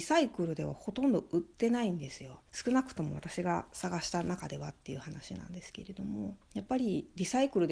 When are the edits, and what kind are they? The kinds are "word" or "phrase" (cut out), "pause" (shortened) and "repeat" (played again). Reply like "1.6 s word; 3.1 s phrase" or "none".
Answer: 2.5 s pause; 6.4 s pause